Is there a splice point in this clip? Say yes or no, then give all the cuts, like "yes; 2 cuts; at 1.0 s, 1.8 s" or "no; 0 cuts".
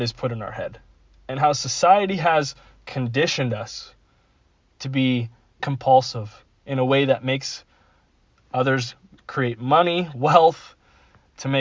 yes; 1 cut; at 5.6 s